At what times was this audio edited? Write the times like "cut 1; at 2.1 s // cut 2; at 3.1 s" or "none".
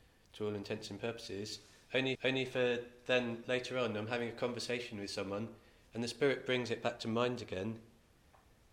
cut 1; at 2.1 s